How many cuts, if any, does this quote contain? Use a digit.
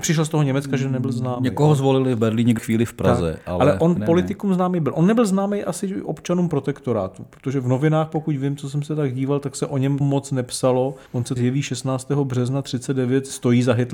5